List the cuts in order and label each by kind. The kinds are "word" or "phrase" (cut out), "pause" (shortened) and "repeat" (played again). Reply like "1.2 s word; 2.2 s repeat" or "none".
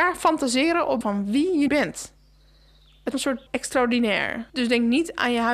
1.0 s word; 1.7 s word; 3.1 s word; 3.5 s word; 4.5 s pause